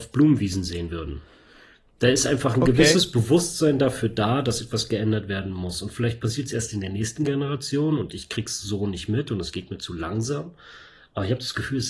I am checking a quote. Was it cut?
no; 0 cuts

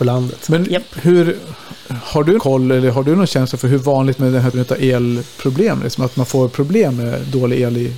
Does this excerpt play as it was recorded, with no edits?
no; 3 cuts; at 2.4 s, 4.2 s, 4.5 s

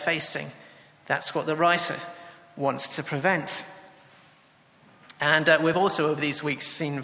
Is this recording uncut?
yes; 0 cuts

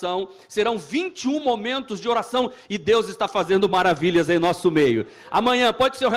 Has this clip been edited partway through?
no; 0 cuts

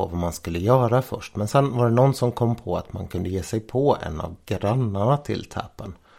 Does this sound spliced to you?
no; 0 cuts

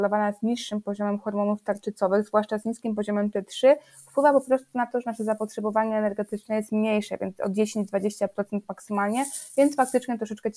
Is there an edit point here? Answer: no; 0 cuts

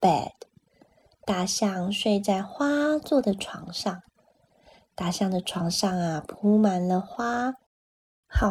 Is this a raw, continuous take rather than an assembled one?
yes; 0 cuts

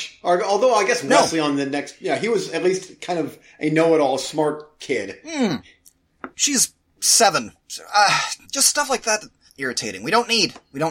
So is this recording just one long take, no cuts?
no; 4 cuts; at 6.3 s, 7.6 s, 8.4 s, 9.5 s

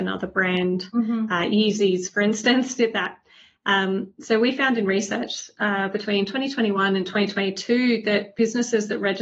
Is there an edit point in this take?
no; 0 cuts

